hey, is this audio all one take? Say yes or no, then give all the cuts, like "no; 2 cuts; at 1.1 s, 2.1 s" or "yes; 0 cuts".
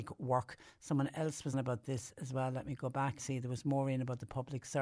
no; 2 cuts; at 1.5 s, 3.2 s